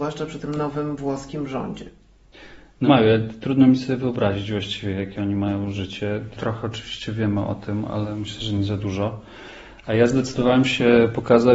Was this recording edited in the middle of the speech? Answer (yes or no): yes